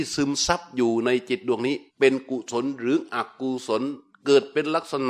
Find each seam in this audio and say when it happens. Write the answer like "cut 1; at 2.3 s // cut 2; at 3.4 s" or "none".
cut 1; at 1.9 s